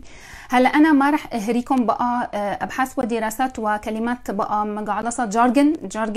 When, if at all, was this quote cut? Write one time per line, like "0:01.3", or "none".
none